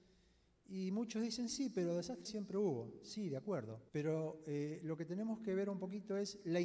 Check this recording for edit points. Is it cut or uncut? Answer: cut